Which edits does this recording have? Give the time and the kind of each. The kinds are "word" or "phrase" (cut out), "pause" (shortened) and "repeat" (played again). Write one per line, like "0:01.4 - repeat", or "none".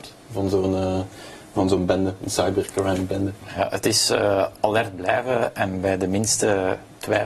none